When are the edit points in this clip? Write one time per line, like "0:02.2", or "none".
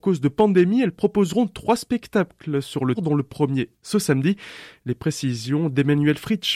0:02.9